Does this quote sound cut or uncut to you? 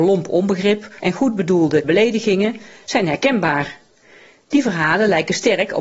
cut